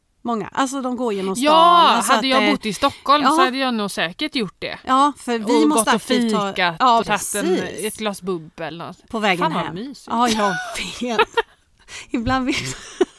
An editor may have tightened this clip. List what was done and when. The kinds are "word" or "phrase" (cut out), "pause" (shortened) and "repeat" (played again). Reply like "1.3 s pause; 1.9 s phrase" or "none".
7.0 s word